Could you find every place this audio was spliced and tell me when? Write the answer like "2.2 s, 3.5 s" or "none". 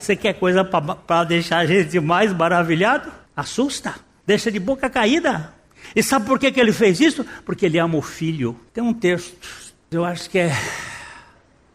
none